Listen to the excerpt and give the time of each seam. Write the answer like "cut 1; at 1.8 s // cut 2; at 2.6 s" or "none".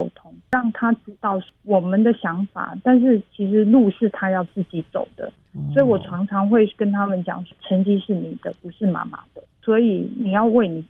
cut 1; at 9.5 s